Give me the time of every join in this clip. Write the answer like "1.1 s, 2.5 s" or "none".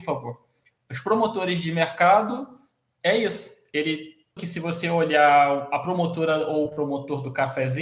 4.4 s